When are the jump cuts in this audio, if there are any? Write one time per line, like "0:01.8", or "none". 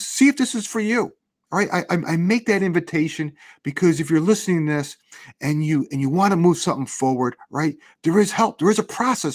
none